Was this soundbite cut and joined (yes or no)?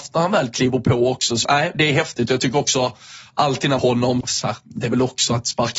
yes